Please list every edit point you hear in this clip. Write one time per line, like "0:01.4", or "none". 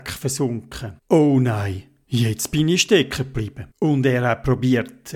0:01.0
0:03.7

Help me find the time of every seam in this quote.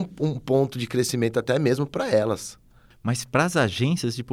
none

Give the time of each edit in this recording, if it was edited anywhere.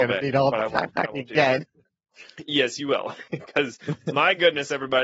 0:03.3

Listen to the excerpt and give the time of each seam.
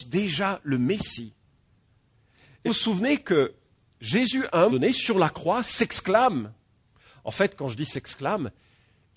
0:02.6
0:04.7

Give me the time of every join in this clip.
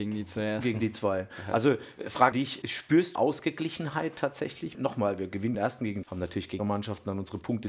0:02.3
0:02.6
0:03.1
0:04.7
0:05.5
0:06.0
0:06.6

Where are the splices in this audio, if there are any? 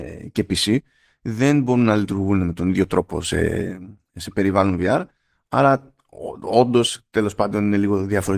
none

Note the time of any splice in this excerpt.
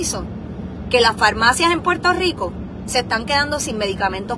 none

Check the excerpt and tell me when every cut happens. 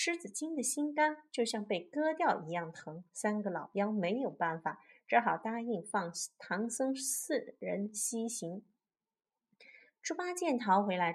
none

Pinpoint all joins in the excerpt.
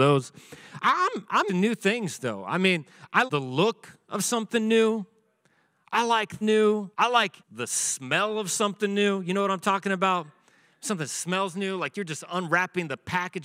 0:01.5
0:03.3
0:06.4
0:06.9
0:07.4

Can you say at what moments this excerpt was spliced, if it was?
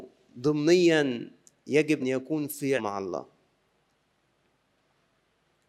0:02.0
0:02.8

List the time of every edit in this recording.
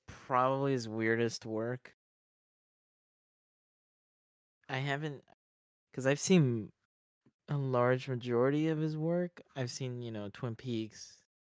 none

